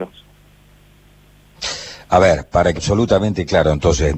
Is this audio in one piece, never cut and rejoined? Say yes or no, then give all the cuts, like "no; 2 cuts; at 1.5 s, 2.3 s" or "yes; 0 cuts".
no; 1 cut; at 2.8 s